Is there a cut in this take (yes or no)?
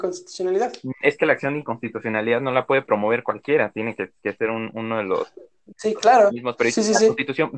no